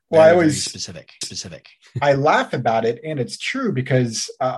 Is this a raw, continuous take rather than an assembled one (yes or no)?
no